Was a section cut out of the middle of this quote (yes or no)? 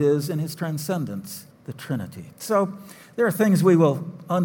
yes